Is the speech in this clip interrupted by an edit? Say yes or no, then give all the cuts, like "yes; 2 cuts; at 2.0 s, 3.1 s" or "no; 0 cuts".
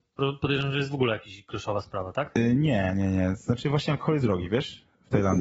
yes; 1 cut; at 4.2 s